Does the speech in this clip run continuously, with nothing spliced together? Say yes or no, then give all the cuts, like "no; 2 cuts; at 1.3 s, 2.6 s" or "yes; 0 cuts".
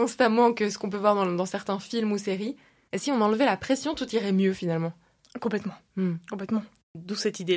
yes; 0 cuts